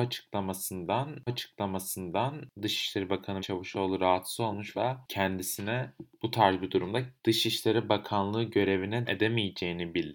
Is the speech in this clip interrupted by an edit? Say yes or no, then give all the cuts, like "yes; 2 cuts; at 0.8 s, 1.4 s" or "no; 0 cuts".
yes; 5 cuts; at 1.3 s, 3.4 s, 4.7 s, 7.2 s, 9.1 s